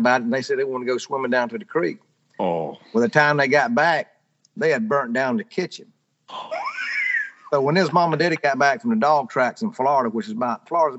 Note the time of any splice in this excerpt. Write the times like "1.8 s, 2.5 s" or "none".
none